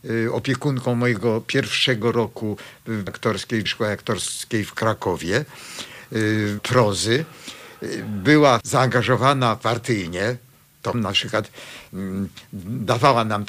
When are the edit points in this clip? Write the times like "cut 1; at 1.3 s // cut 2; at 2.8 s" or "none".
cut 1; at 3.1 s // cut 2; at 3.7 s // cut 3; at 6.6 s // cut 4; at 8.6 s // cut 5; at 10.9 s